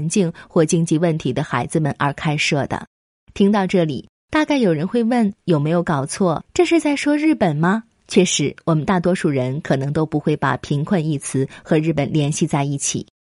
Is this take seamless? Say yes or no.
yes